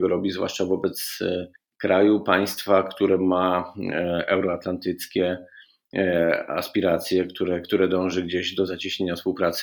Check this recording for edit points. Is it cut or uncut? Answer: cut